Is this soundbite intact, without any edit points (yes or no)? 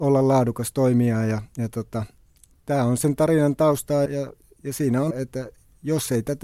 no